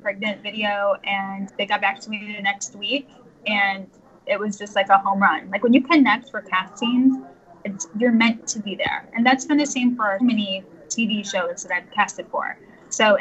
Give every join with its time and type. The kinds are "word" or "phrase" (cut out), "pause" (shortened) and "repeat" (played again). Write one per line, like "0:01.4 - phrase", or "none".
0:01.5 - word
0:10.2 - word
0:11.9 - word